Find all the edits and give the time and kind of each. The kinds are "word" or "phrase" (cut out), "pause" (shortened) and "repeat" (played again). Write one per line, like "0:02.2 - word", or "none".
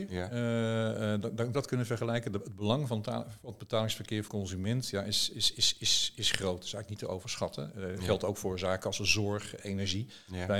0:01.5 - phrase
0:04.3 - word